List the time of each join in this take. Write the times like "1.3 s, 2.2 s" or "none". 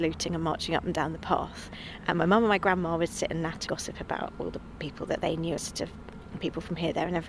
3.7 s, 5.6 s